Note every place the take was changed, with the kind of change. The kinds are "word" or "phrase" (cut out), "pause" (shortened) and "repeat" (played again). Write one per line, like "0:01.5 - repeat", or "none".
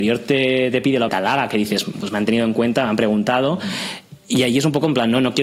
0:01.1 - phrase